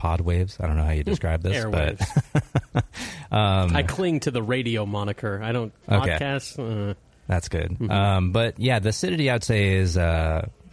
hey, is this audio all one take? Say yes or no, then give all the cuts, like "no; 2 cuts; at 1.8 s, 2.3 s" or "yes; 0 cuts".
yes; 0 cuts